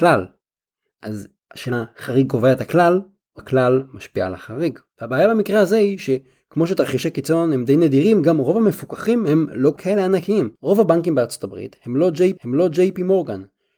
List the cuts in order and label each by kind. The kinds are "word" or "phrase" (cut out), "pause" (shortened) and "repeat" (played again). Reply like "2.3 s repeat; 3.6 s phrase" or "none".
1.7 s word; 3.4 s word; 4.9 s pause; 10.6 s pause; 12.4 s repeat